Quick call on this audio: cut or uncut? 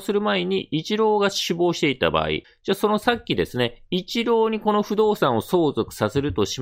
uncut